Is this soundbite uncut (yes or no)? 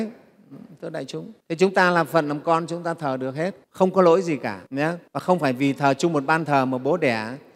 no